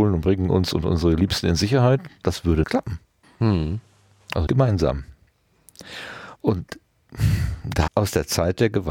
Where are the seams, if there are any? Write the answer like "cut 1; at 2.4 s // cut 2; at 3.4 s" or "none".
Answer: cut 1; at 2.6 s // cut 2; at 3.2 s // cut 3; at 4.5 s // cut 4; at 6.4 s // cut 5; at 7.9 s